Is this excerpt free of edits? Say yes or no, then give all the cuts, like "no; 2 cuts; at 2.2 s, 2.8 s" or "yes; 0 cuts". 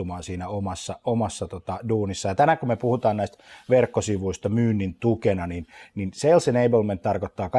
yes; 0 cuts